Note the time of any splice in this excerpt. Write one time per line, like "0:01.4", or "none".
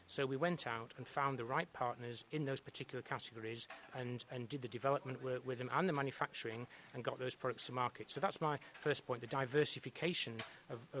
0:03.9